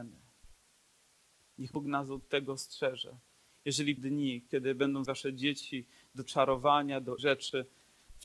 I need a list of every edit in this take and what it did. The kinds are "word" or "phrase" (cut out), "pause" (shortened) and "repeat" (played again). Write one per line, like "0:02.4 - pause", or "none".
0:01.7 - word
0:04.0 - word
0:05.1 - word
0:06.2 - word
0:07.2 - word